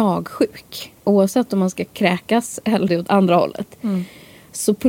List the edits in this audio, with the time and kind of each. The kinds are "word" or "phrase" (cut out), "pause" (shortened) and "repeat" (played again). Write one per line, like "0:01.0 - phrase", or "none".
0:01.0 - pause
0:02.9 - word